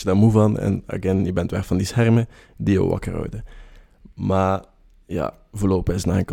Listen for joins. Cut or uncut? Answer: uncut